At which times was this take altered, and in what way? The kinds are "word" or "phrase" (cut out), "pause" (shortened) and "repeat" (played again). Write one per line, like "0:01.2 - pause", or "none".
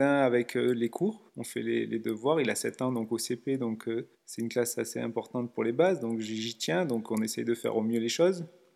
0:01.3 - pause
0:04.1 - pause